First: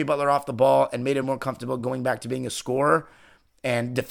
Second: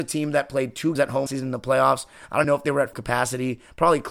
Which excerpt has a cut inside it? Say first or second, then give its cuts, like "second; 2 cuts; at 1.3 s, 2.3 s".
second; 4 cuts; at 1.0 s, 1.3 s, 2.4 s, 2.9 s